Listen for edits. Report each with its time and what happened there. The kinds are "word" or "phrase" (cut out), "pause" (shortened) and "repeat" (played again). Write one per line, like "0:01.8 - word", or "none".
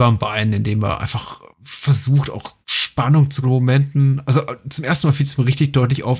0:01.5 - pause
0:02.6 - pause
0:03.4 - phrase